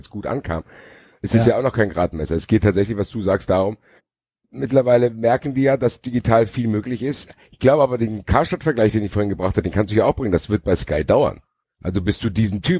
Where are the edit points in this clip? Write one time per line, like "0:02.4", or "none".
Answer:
0:04.0
0:11.6